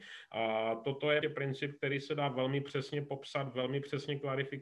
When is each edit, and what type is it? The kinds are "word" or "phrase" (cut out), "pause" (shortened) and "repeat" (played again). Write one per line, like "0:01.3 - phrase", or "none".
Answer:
0:01.2 - word